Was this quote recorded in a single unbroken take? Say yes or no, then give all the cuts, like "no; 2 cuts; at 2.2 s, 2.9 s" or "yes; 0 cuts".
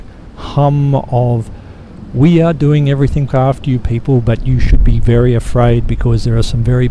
no; 1 cut; at 3.3 s